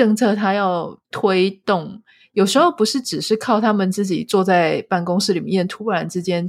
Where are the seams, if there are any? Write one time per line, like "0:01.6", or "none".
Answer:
0:01.0